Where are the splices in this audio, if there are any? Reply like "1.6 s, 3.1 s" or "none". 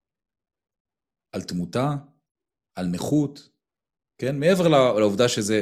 none